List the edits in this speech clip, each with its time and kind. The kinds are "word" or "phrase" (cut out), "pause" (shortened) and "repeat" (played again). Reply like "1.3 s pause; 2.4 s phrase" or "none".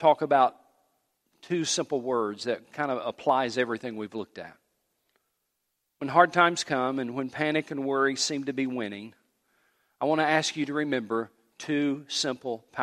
none